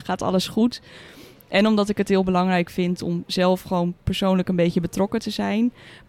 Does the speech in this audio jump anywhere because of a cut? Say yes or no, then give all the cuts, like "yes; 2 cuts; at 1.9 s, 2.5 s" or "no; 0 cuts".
no; 0 cuts